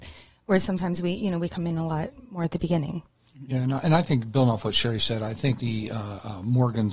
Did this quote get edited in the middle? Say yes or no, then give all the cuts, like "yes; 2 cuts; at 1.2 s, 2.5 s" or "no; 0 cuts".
yes; 1 cut; at 5.6 s